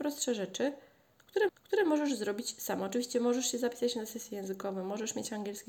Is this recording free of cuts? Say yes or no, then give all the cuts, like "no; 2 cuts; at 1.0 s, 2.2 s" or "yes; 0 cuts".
no; 1 cut; at 1.5 s